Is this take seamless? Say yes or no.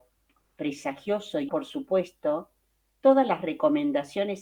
no